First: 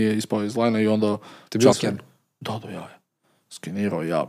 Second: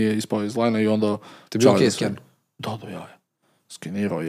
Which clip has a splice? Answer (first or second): first